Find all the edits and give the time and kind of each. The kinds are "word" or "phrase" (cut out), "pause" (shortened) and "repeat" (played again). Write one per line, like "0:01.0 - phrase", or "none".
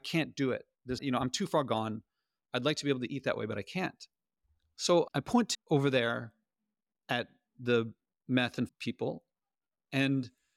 0:01.0 - word
0:05.5 - word
0:08.7 - word